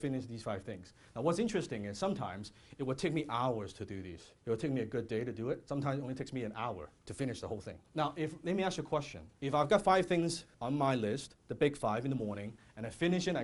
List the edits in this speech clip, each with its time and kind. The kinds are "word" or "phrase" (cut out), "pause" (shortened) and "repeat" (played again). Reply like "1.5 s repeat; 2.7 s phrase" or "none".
4.4 s pause; 7.0 s pause; 7.8 s pause; 9.3 s pause; 10.5 s pause; 11.4 s pause